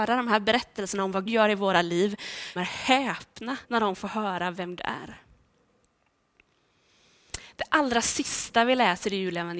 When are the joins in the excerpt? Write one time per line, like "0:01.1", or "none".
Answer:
0:01.3
0:02.6
0:03.6
0:04.8